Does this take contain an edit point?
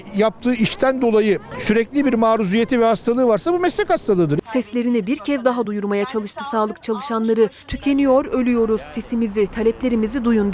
no; 0 cuts

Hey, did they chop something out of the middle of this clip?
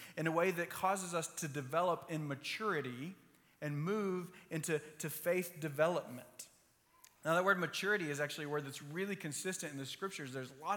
no; 0 cuts

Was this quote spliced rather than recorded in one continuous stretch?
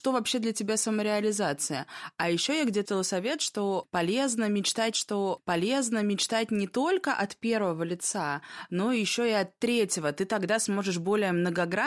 yes; 2 cuts; at 2.8 s, 4.9 s

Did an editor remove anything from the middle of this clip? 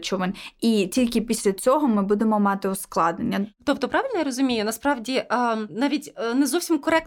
no; 0 cuts

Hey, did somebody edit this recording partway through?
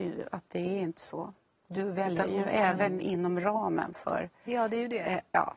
no; 0 cuts

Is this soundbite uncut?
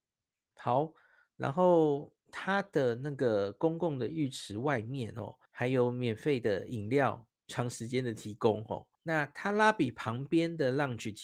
no; 3 cuts; at 2.2 s, 5.5 s, 8.9 s

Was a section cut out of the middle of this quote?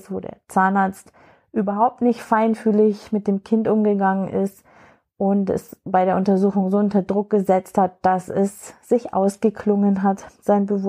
no; 0 cuts

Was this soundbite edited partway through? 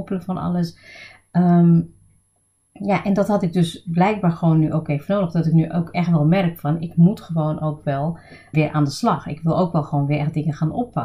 yes; 1 cut; at 8.5 s

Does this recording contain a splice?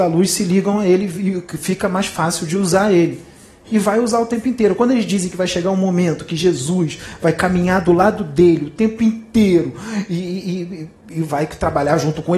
no; 0 cuts

